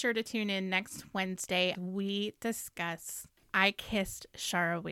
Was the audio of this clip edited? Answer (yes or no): yes